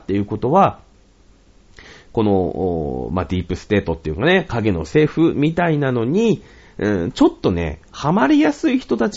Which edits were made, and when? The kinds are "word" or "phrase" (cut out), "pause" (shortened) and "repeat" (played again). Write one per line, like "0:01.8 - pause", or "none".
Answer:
none